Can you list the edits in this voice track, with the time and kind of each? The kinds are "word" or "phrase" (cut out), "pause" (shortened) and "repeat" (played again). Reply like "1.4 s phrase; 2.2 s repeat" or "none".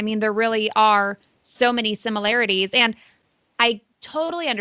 none